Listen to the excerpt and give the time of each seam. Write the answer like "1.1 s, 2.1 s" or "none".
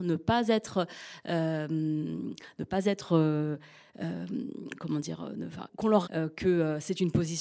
6.0 s